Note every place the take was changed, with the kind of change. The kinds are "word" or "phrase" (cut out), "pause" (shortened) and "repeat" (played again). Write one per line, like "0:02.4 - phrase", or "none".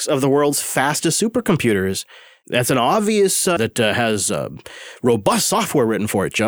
0:03.6 - word